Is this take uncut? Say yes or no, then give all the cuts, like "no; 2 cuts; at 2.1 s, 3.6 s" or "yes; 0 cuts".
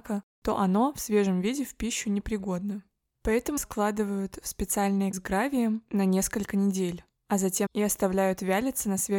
no; 3 cuts; at 3.6 s, 5.1 s, 7.7 s